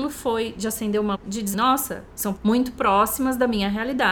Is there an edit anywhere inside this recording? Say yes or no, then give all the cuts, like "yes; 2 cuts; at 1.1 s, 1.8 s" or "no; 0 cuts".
yes; 3 cuts; at 1.1 s, 1.5 s, 2.3 s